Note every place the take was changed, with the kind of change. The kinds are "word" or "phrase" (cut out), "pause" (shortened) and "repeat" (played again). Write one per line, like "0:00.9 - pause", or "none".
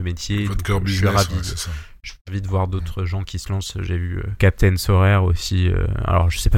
none